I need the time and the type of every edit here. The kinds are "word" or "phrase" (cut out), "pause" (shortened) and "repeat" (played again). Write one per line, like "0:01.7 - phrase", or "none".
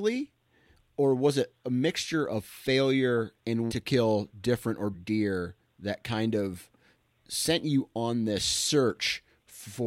0:03.7 - word
0:04.9 - word